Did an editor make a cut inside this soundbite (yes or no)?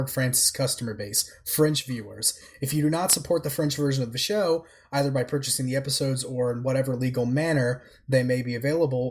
no